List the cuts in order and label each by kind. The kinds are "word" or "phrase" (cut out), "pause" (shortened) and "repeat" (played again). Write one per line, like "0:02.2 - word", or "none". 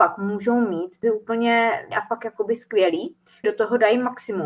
0:01.0 - word
0:01.9 - word
0:03.4 - word